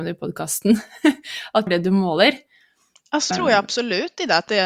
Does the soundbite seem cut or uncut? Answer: cut